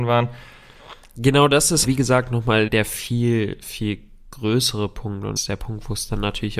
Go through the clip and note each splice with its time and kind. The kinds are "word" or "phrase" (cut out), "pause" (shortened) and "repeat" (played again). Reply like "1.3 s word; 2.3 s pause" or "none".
1.8 s word; 2.7 s word; 5.4 s word